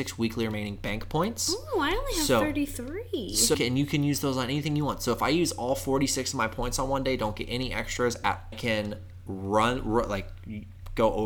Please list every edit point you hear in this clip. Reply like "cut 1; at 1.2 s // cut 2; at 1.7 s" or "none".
cut 1; at 3.5 s // cut 2; at 8.5 s